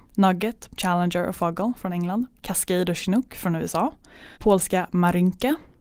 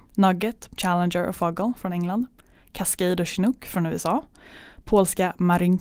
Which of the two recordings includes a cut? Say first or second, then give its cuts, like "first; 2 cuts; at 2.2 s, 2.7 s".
first; 2 cuts; at 2.4 s, 4.3 s